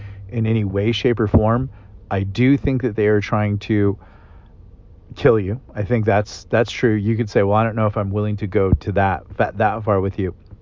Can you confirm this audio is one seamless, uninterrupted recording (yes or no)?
yes